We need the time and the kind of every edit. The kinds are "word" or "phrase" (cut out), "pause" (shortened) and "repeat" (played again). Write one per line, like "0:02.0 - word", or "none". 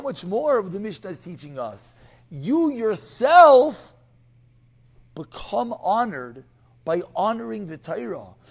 none